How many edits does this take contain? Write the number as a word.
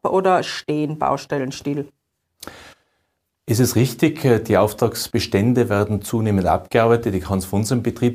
zero